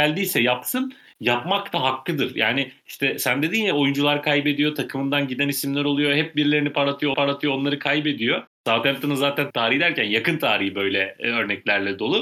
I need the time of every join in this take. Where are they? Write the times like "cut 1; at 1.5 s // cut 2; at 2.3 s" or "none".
cut 1; at 7.1 s // cut 2; at 8.5 s // cut 3; at 9.5 s